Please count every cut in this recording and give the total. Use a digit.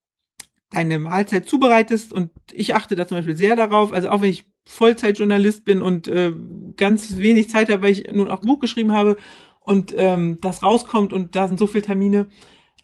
1